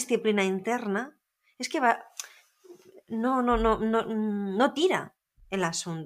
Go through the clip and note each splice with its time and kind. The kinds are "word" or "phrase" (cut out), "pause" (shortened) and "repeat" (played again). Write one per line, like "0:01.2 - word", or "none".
none